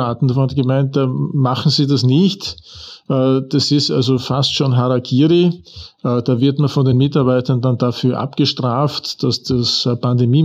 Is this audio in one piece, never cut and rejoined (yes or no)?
yes